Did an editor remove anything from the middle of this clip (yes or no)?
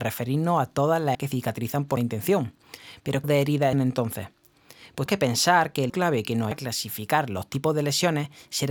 yes